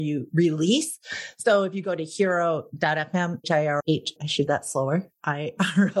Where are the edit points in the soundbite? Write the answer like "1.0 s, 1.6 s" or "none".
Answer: 3.4 s, 3.8 s, 4.2 s, 4.5 s